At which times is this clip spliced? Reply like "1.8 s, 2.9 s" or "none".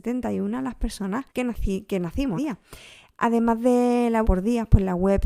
1.3 s, 2.4 s, 4.2 s